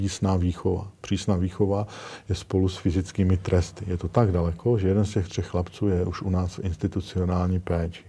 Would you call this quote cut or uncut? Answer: uncut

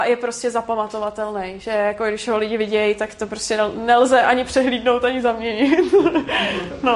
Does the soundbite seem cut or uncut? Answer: uncut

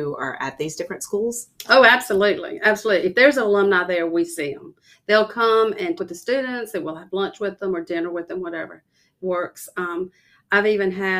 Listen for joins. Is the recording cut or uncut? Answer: cut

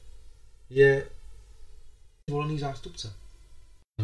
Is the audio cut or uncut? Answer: cut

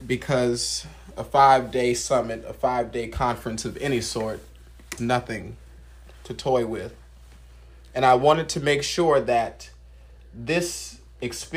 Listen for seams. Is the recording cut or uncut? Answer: cut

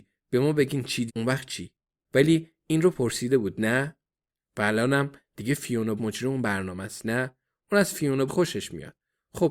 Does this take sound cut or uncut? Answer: cut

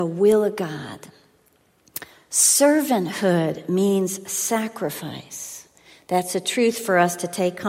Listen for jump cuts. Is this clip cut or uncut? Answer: uncut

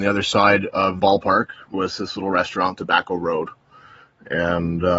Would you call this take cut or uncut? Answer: cut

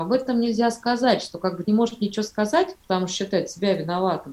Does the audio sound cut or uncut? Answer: cut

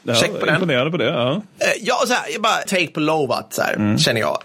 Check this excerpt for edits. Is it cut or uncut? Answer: cut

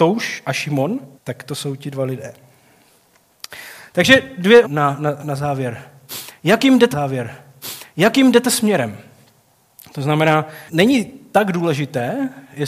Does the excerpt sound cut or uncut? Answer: cut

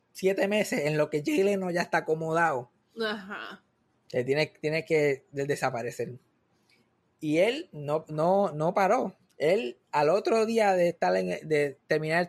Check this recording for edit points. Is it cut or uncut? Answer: uncut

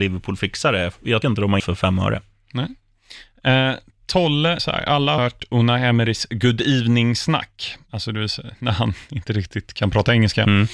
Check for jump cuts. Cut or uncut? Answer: cut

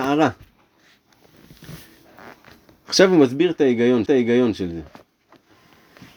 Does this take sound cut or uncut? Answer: cut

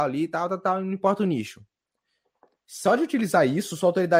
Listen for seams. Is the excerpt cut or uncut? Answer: uncut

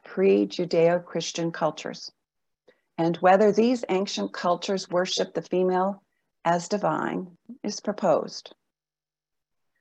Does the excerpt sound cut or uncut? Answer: uncut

